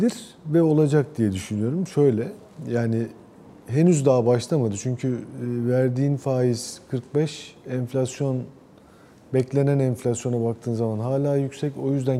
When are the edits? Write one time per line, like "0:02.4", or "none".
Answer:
none